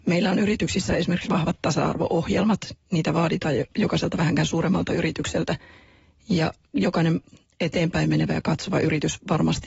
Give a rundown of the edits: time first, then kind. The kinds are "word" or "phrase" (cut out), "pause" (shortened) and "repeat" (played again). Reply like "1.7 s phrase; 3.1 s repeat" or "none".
none